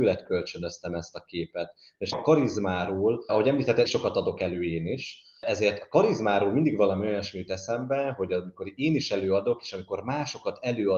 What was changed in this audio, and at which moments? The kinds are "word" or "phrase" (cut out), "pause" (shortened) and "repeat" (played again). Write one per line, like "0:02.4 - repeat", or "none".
0:02.1 - word
0:03.3 - word
0:03.8 - word

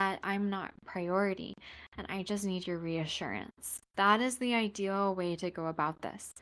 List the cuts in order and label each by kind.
0:03.9 - pause

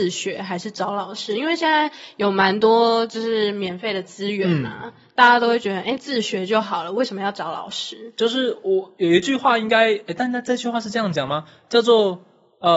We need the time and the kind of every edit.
none

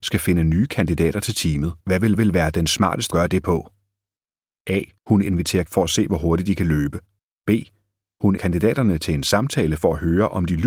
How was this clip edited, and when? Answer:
0:01.8 - pause
0:02.1 - repeat
0:03.1 - phrase
0:05.0 - pause
0:05.7 - phrase
0:07.2 - pause
0:08.4 - word

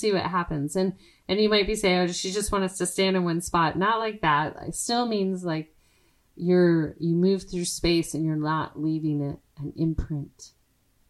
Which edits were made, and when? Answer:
none

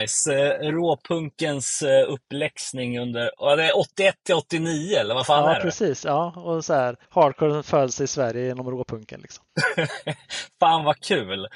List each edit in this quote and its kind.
0:07.0 - pause
0:09.5 - pause

